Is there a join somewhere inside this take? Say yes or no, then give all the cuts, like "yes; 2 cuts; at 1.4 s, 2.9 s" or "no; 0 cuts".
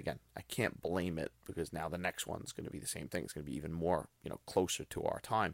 no; 0 cuts